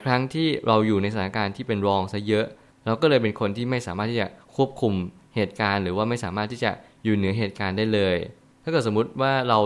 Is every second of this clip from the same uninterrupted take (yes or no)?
yes